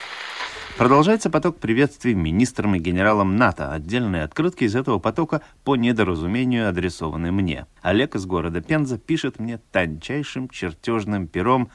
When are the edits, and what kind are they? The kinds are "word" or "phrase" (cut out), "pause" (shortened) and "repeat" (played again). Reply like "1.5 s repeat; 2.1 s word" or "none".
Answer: 7.8 s pause